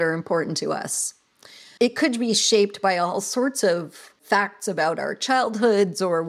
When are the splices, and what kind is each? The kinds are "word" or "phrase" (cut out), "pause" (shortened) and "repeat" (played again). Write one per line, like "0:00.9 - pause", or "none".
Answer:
none